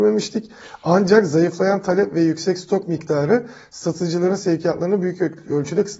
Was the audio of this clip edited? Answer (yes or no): no